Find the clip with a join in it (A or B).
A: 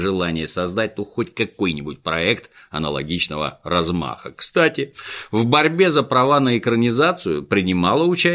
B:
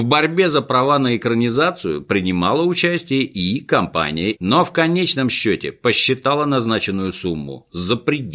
B